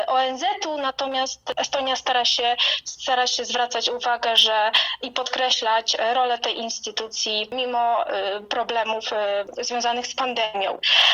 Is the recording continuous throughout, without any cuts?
yes; 0 cuts

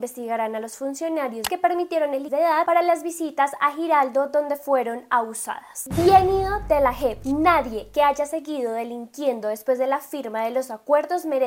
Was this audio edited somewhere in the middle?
yes; 2 cuts; at 1.5 s, 2.3 s

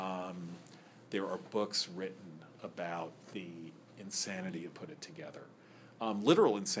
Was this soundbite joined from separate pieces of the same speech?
yes; 2 cuts; at 3.3 s, 4.7 s

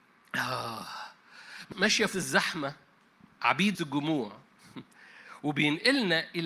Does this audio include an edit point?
yes; 3 cuts; at 1.7 s, 2.1 s, 3.7 s

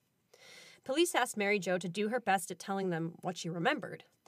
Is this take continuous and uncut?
yes; 0 cuts

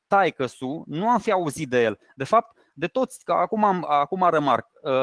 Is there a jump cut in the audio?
no; 0 cuts

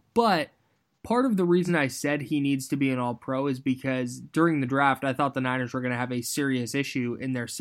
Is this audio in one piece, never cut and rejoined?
yes; 0 cuts

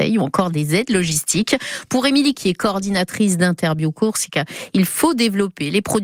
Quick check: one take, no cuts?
no; 1 cut; at 2.3 s

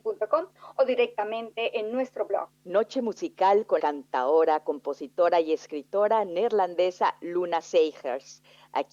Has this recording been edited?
yes; 1 cut; at 3.8 s

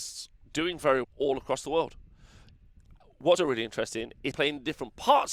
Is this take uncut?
no; 3 cuts; at 1.0 s, 3.4 s, 4.3 s

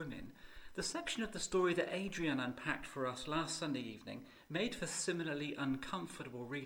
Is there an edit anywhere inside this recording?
no; 0 cuts

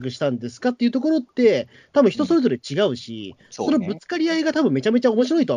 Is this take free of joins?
yes; 0 cuts

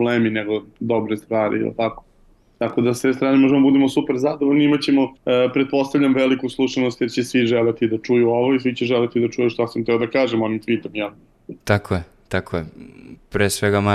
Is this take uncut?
no; 2 cuts; at 5.2 s, 11.6 s

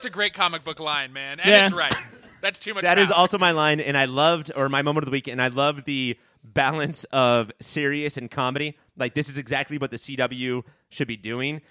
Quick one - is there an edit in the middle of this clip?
no; 0 cuts

